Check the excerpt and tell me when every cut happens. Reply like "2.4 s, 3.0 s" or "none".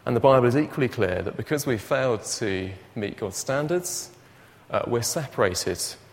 none